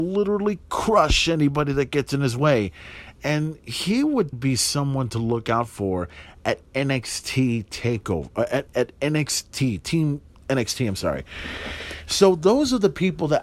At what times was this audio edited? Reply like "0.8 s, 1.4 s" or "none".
4.3 s, 8.7 s